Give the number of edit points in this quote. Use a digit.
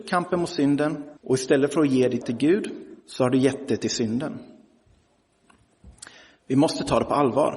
3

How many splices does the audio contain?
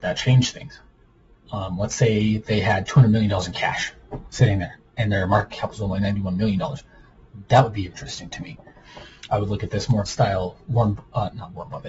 2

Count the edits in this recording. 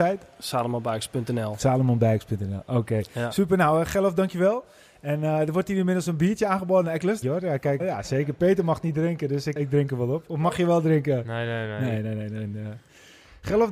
3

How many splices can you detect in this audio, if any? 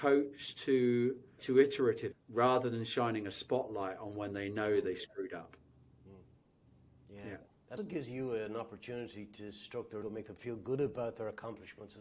4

